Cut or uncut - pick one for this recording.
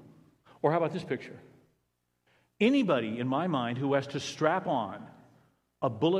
uncut